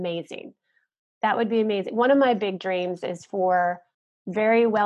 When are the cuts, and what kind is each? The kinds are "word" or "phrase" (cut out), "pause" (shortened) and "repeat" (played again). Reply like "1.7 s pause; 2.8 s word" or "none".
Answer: none